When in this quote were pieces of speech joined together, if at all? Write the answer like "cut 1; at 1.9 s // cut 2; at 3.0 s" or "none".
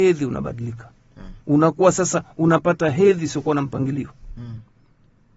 cut 1; at 1.4 s